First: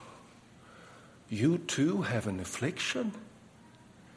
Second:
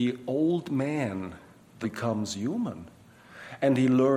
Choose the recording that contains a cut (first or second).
second